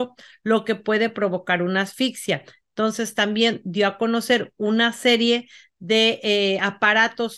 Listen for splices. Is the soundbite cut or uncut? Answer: uncut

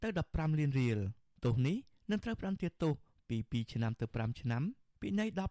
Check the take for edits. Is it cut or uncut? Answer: uncut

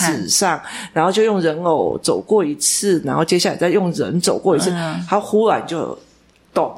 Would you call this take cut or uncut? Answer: uncut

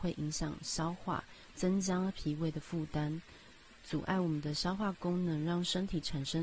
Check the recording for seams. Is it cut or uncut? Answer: uncut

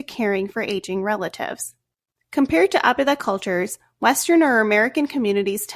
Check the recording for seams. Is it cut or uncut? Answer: uncut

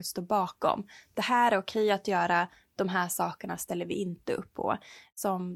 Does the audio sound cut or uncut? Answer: uncut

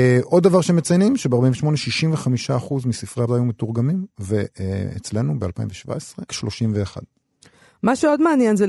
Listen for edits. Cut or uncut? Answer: cut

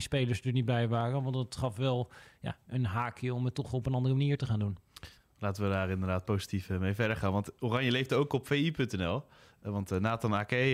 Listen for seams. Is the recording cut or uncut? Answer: uncut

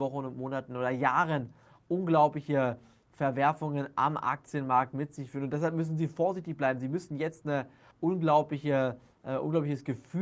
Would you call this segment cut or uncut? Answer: uncut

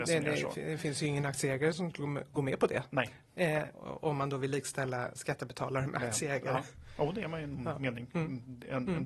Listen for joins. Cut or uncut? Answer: uncut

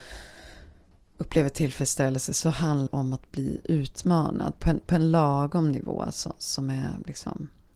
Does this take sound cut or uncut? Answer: cut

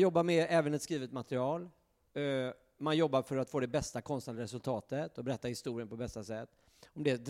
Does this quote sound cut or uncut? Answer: uncut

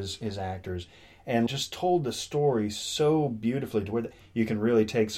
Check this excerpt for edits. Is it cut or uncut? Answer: cut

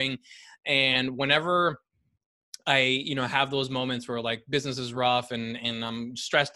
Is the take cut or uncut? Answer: uncut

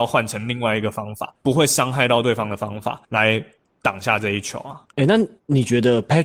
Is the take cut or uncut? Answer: cut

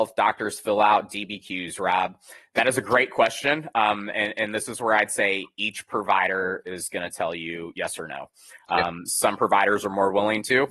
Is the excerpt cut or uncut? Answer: uncut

